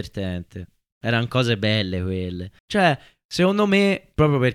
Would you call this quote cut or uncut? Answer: cut